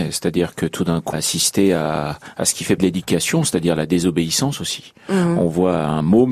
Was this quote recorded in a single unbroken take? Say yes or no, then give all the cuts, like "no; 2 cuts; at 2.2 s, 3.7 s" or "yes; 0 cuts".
no; 2 cuts; at 1.1 s, 2.8 s